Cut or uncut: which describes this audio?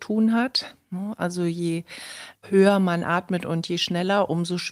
uncut